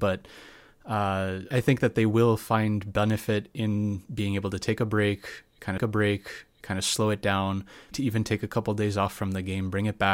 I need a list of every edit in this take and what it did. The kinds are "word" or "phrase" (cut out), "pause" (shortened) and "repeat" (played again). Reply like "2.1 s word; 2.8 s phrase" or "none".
1.5 s word; 5.8 s repeat; 7.9 s word